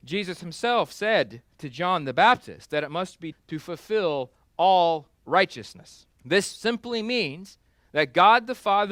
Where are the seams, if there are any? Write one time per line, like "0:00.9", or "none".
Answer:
0:03.3
0:06.1